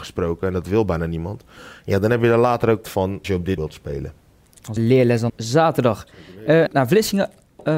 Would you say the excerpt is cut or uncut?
cut